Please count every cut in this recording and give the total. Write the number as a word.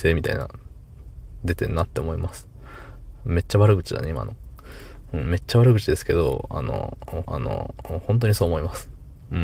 one